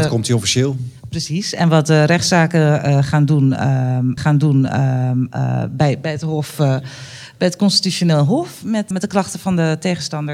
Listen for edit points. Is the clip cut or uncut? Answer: cut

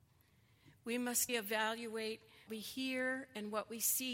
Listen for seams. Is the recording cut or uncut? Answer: cut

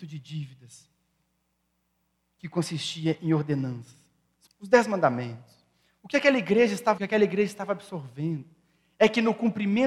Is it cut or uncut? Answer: cut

